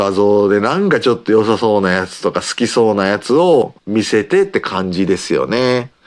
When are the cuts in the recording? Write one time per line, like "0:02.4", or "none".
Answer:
0:03.8